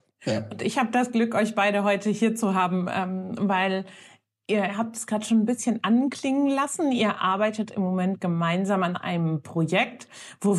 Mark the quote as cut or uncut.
uncut